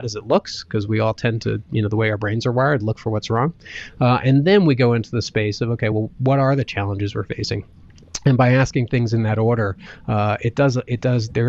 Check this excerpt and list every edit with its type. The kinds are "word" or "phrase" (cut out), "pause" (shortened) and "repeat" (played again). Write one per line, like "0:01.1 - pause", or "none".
none